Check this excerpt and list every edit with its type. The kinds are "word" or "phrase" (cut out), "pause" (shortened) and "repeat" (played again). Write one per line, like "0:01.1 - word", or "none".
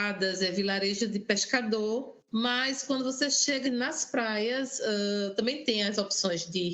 0:02.2 - pause
0:03.6 - word

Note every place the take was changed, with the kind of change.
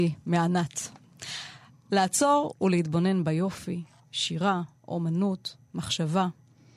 none

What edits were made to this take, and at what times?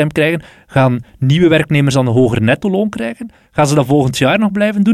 none

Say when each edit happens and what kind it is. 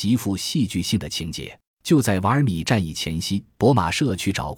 0:01.7 - pause
0:03.5 - pause

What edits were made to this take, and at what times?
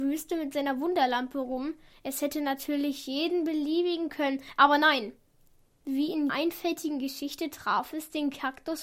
0:04.1 - phrase
0:06.3 - word

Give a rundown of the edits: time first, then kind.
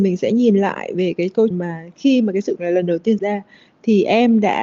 0:01.5 - word
0:02.6 - word
0:03.2 - word

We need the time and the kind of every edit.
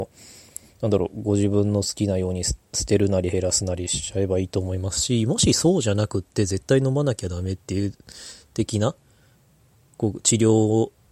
none

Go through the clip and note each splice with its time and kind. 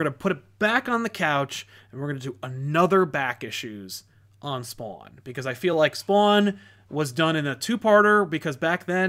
none

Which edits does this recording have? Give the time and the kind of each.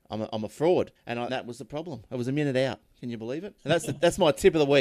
0:00.9 - pause
0:01.3 - word
0:03.6 - pause

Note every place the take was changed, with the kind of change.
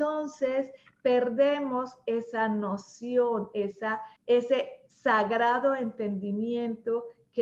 0:04.2 - pause

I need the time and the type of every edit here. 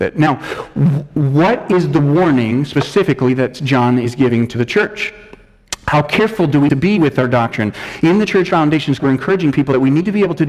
0:06.7 - word
0:09.0 - word

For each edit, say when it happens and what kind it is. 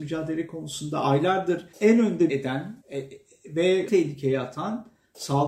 0:01.7 - pause
0:02.3 - word
0:02.8 - pause
0:03.9 - word

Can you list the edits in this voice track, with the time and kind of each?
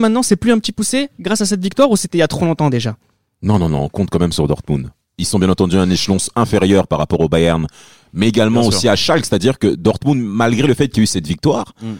none

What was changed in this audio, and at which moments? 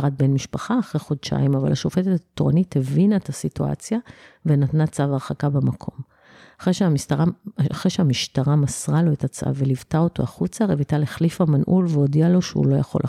none

